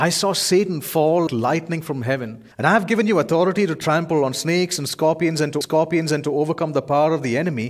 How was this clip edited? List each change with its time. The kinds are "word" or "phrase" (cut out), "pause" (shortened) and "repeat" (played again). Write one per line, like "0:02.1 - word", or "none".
0:01.3 - word
0:02.5 - pause
0:05.6 - repeat